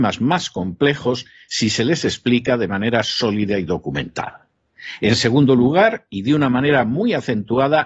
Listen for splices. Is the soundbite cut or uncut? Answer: uncut